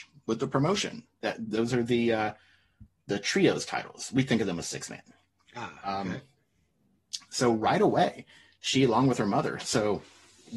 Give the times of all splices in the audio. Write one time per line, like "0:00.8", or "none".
none

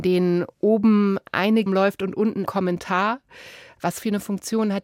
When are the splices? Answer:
0:01.7
0:02.4

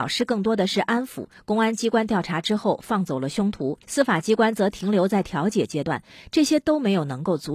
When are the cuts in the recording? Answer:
0:03.8

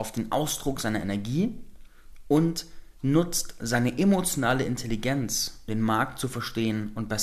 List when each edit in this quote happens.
0:05.7

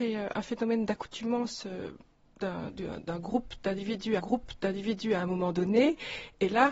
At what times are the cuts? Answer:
0:02.7
0:04.2

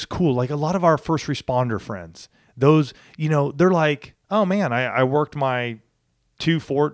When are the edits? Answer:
none

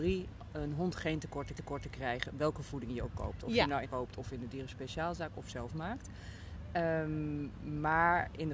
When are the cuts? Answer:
0:01.6
0:03.8

